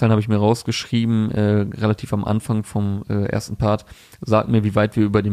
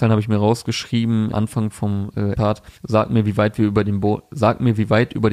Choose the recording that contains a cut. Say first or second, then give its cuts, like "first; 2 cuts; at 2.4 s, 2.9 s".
second; 3 cuts; at 1.3 s, 2.3 s, 2.8 s